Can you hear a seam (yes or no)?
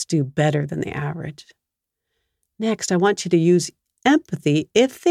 no